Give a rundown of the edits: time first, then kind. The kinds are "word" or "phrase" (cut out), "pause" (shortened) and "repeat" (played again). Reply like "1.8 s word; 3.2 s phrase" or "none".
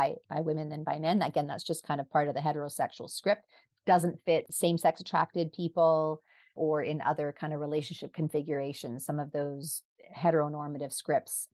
none